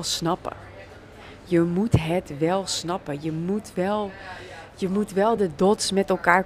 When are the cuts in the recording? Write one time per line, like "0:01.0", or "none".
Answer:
none